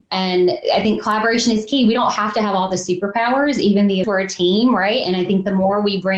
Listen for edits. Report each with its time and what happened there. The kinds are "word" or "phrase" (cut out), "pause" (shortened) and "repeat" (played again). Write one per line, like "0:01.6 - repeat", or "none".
0:04.0 - word